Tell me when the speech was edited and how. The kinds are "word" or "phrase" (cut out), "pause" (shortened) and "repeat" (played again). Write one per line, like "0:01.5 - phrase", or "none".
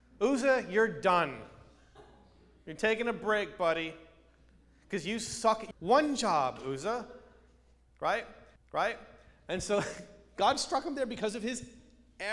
0:05.7 - phrase
0:08.6 - repeat